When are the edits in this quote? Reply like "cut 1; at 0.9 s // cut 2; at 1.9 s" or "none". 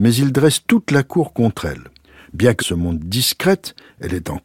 cut 1; at 2.0 s // cut 2; at 2.6 s